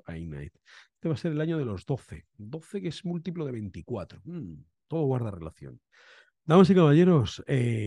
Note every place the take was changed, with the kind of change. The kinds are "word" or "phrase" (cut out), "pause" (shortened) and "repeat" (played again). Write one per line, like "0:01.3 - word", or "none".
none